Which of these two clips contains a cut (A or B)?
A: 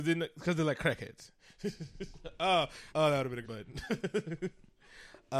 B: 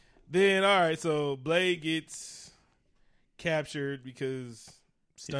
A